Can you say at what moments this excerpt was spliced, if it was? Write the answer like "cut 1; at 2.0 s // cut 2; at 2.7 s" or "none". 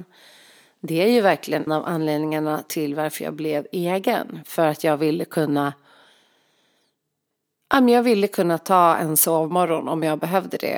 cut 1; at 1.7 s